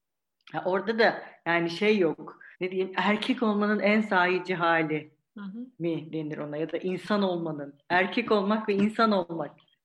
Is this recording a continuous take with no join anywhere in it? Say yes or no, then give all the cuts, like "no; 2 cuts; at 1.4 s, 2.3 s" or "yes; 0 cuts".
no; 2 cuts; at 2.5 s, 5.7 s